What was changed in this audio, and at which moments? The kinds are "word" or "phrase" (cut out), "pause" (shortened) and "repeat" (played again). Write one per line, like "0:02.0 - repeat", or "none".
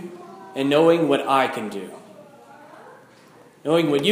none